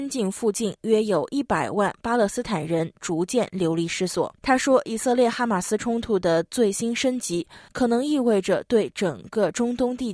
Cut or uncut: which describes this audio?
cut